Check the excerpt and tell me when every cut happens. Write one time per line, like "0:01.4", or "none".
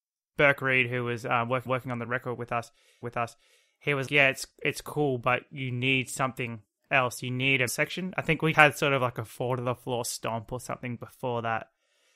0:01.7
0:03.0
0:04.1
0:06.8
0:07.7
0:08.5